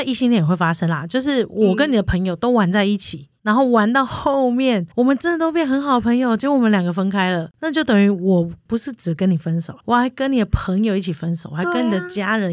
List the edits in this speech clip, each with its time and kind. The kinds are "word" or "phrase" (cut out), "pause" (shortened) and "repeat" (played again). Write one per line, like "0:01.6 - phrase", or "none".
0:04.9 - pause
0:09.8 - pause